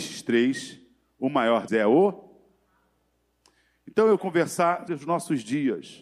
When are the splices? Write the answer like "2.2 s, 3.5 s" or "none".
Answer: 1.7 s, 4.2 s, 4.9 s